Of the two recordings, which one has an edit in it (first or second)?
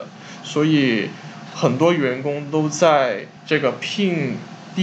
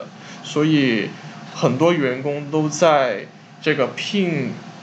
first